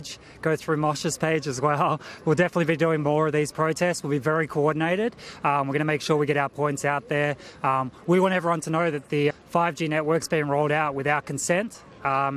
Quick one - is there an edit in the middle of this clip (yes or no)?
yes